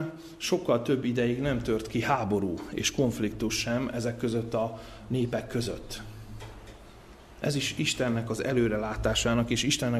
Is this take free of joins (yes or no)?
yes